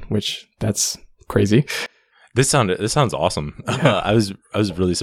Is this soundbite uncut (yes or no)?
yes